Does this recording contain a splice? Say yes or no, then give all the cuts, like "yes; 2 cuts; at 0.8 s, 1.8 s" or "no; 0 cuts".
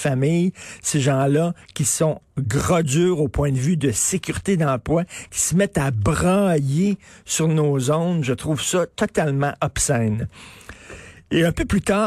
no; 0 cuts